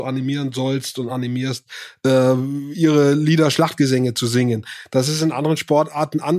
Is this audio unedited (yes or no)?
yes